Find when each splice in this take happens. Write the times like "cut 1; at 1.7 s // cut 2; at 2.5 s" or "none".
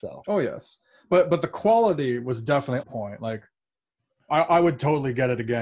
cut 1; at 2.8 s